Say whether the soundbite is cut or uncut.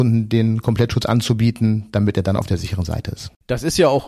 uncut